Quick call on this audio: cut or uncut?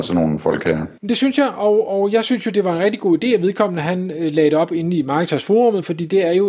cut